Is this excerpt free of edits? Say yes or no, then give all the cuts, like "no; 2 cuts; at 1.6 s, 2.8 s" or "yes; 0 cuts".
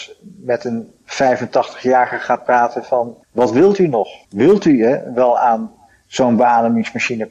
no; 2 cuts; at 3.2 s, 4.2 s